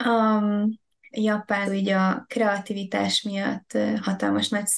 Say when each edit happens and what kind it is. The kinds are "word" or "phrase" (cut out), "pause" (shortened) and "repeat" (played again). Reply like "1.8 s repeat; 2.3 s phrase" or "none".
1.1 s word; 1.6 s word